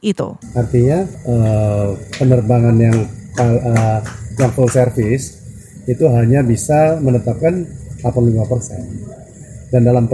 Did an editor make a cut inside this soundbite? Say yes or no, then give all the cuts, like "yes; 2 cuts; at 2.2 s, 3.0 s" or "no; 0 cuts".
no; 0 cuts